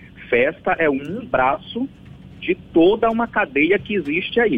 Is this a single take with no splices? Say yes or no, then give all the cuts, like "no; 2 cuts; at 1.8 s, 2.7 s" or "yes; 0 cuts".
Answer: yes; 0 cuts